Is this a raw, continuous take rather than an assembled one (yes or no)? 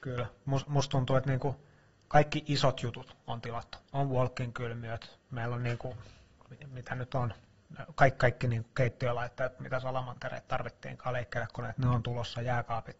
yes